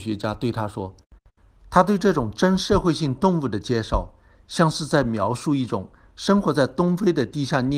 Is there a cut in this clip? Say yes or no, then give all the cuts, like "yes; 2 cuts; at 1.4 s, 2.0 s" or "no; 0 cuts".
no; 0 cuts